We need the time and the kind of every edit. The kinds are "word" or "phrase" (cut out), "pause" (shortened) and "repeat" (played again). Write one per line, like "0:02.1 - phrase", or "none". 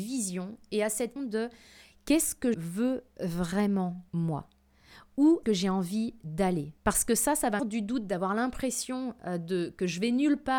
0:01.2 - word
0:02.5 - word
0:04.1 - pause
0:05.4 - word
0:06.8 - pause
0:07.6 - phrase